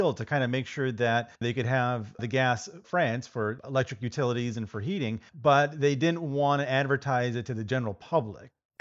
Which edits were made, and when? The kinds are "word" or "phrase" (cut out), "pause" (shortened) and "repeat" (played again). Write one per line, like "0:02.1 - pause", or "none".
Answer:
0:01.3 - pause
0:02.8 - word
0:05.3 - pause